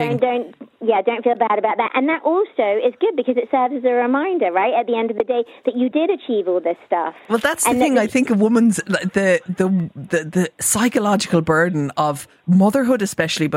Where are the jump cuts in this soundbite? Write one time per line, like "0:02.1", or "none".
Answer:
none